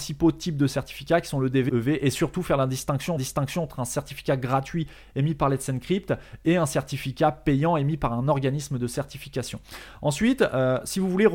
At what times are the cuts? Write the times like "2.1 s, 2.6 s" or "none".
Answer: 1.7 s, 3.2 s